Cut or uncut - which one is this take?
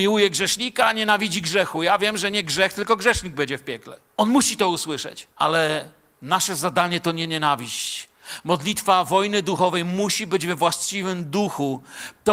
cut